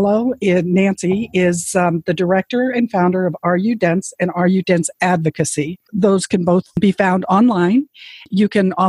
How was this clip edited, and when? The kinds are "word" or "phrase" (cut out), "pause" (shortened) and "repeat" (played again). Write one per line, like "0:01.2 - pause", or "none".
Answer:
none

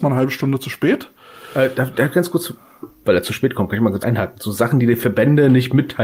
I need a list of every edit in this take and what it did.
0:04.0 - word

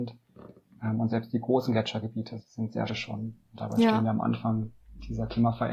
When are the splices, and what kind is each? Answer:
0:02.4 - word
0:02.9 - phrase

